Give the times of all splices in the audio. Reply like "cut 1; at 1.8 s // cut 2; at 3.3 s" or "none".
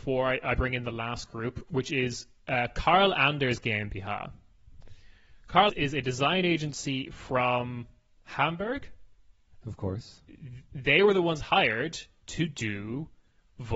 cut 1; at 5.7 s // cut 2; at 9.6 s // cut 3; at 10.7 s